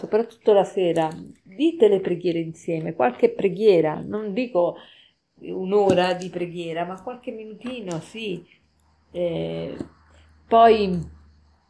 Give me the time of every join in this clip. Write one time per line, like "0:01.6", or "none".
none